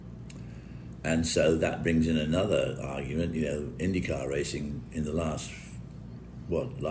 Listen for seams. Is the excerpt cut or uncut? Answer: uncut